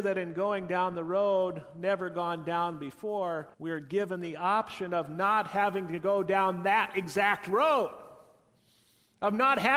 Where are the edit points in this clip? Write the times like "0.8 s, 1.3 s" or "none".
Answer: 3.5 s